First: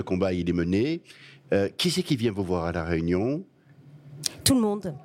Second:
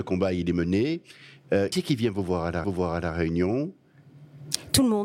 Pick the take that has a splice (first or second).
second